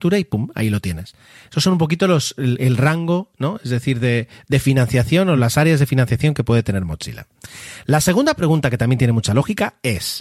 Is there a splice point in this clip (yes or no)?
no